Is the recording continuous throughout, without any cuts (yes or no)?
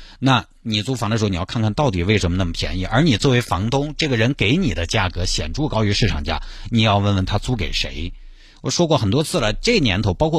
yes